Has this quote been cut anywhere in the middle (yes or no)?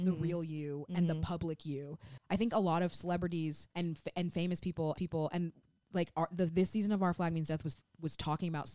yes